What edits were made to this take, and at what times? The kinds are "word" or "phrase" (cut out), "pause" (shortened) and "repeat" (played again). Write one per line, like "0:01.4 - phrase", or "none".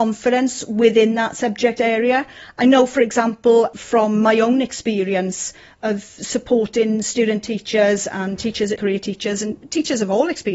0:08.8 - word